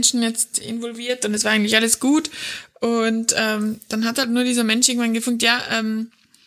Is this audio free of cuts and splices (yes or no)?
yes